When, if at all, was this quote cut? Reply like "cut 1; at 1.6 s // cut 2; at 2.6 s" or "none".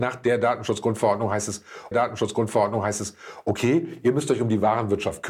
cut 1; at 1.9 s